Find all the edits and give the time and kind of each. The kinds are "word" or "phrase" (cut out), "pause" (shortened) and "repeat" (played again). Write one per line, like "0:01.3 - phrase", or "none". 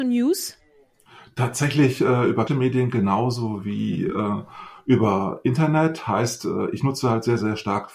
0:02.5 - word

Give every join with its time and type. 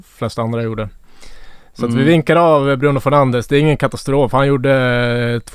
none

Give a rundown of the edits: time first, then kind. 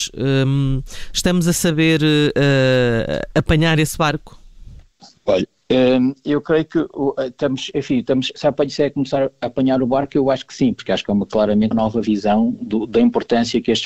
0:05.0 - pause
0:11.7 - word

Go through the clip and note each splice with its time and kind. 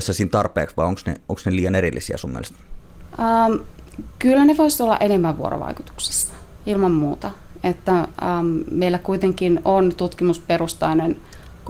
none

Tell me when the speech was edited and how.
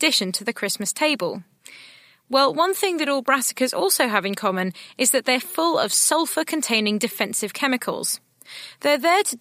none

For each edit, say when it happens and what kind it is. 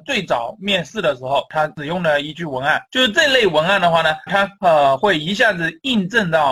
0:04.3 - word

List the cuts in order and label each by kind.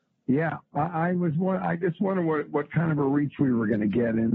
none

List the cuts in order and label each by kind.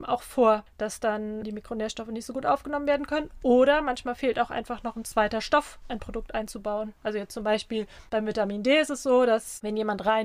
0:05.8 - word

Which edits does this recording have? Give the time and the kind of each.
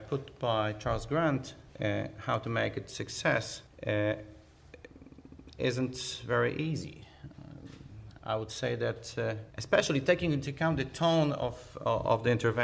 0:01.7 - pause
0:03.7 - pause
0:09.5 - pause

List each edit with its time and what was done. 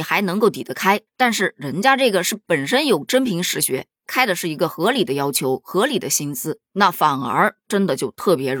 0:01.1 - pause

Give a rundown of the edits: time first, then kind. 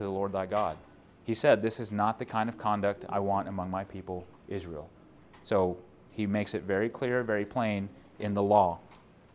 none

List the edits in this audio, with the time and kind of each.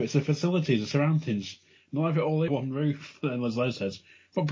0:02.5 - word

